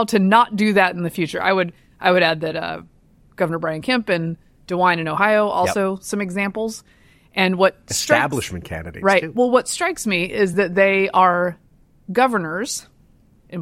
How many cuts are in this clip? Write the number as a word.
zero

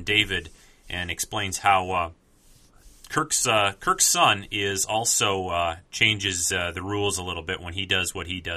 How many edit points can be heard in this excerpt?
zero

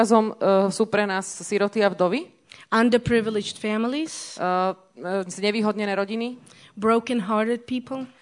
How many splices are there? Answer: zero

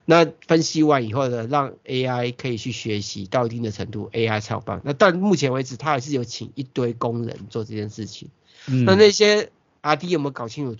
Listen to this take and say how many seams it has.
zero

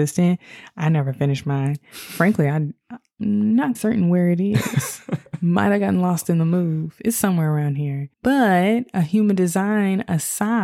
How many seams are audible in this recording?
two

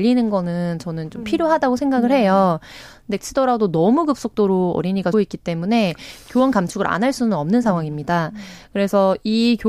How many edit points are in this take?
two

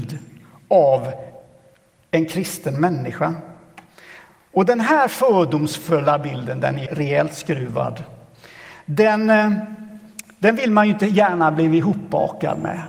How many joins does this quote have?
one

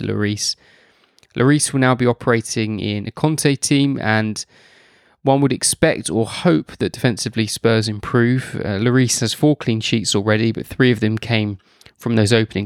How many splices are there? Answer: zero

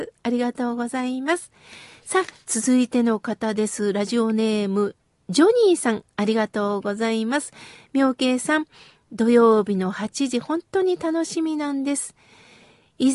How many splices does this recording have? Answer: zero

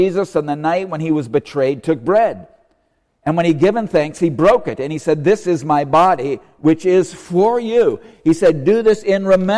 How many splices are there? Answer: zero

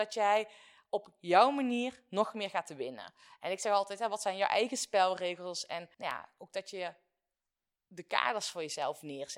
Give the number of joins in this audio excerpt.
one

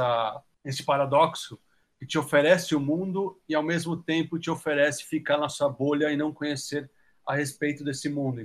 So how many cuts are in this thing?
zero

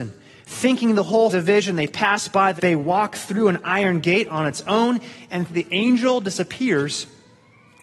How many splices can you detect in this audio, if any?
three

